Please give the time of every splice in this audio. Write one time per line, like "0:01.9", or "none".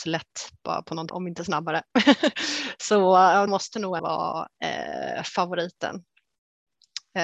0:01.1
0:03.5
0:04.0